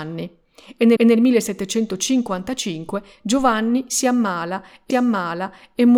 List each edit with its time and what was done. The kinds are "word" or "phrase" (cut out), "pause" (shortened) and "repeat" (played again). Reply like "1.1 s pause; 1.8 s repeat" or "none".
1.0 s repeat; 4.9 s repeat